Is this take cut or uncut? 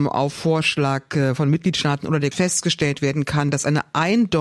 cut